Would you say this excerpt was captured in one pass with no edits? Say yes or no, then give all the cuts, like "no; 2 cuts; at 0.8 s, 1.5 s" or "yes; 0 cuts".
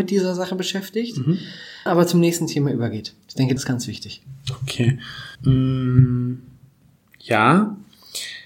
no; 4 cuts; at 1.9 s, 3.2 s, 3.6 s, 5.3 s